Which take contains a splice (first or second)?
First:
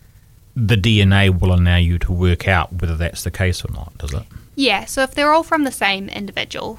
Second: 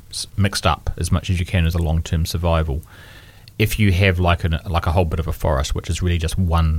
second